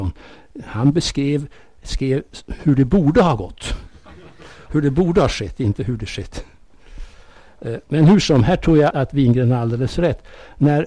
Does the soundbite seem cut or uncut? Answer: cut